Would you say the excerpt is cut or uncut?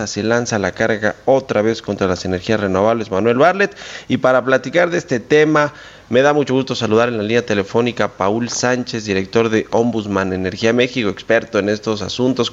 uncut